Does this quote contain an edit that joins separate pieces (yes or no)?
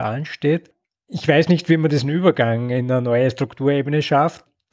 no